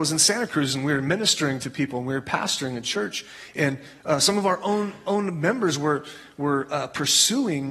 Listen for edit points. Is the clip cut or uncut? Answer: uncut